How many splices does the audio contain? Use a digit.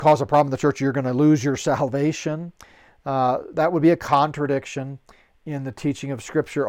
0